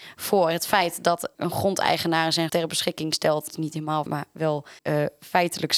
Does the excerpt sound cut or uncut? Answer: cut